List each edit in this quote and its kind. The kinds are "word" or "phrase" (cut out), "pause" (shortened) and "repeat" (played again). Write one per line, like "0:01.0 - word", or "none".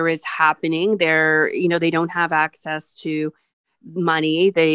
none